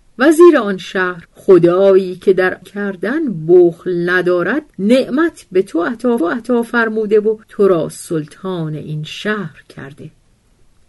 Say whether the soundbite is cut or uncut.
cut